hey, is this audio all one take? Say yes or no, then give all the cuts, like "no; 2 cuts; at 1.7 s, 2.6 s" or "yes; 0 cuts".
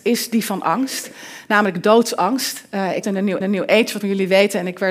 no; 3 cuts; at 3.0 s, 3.4 s, 4.0 s